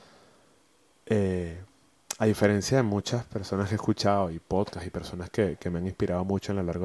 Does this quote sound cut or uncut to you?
uncut